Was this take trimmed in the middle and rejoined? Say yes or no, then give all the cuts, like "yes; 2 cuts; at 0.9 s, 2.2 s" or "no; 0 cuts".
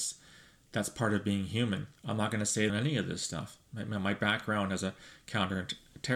yes; 2 cuts; at 2.0 s, 2.7 s